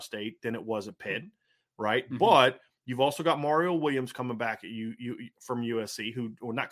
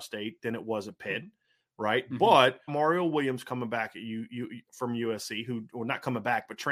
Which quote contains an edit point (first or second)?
second